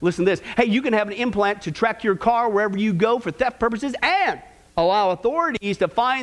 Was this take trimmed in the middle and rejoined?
no; 0 cuts

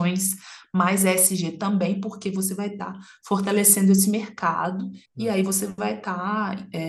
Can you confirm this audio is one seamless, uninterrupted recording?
no; 1 cut; at 5.0 s

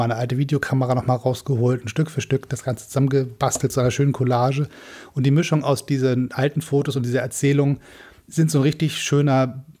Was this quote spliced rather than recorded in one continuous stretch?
no; 0 cuts

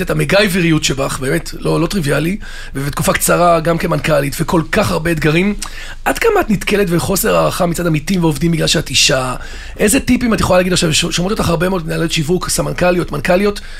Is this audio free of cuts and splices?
yes; 0 cuts

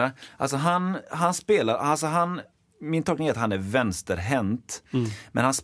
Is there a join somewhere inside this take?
no; 0 cuts

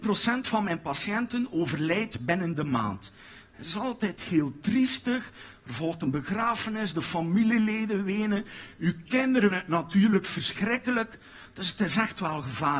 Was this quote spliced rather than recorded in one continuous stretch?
yes; 1 cut; at 9.5 s

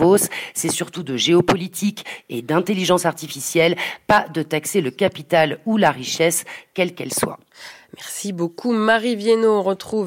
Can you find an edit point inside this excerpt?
no; 0 cuts

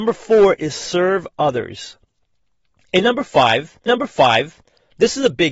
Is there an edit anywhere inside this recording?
yes; 1 cut; at 3.9 s

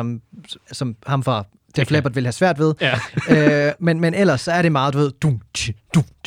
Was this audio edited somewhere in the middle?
no; 0 cuts

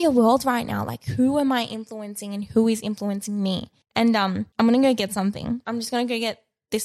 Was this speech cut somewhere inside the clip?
yes; 2 cuts; at 3.8 s, 4.5 s

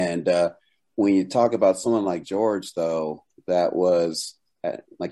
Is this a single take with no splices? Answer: yes; 0 cuts

